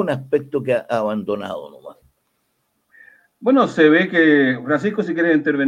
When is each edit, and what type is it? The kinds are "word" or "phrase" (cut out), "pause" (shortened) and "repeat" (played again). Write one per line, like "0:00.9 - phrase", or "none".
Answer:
none